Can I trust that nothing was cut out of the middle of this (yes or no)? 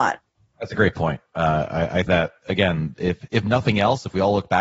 no